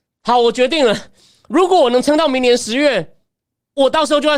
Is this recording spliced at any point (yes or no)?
no